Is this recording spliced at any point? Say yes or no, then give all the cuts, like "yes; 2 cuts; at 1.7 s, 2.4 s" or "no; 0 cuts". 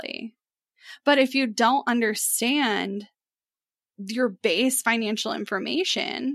no; 0 cuts